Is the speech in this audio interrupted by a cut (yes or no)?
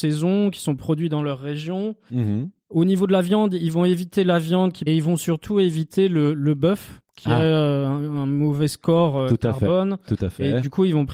yes